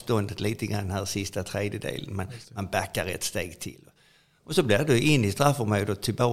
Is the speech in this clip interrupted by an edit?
no; 0 cuts

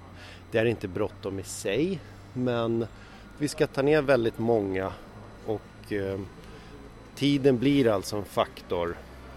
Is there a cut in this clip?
no; 0 cuts

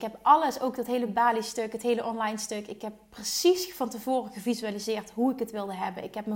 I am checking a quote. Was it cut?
no; 0 cuts

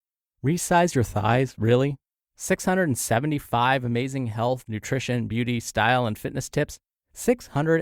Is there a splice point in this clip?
no; 0 cuts

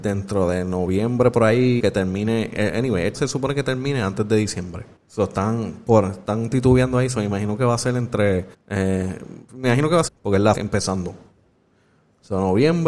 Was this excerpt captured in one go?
no; 6 cuts; at 1.8 s, 3.1 s, 5.0 s, 8.5 s, 10.1 s, 10.5 s

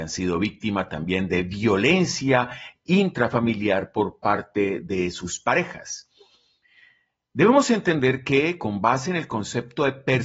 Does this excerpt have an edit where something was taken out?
no; 0 cuts

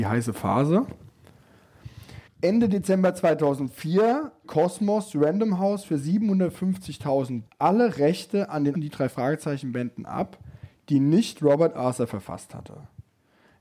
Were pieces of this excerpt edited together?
yes; 4 cuts; at 2.3 s, 4.4 s, 7.5 s, 8.7 s

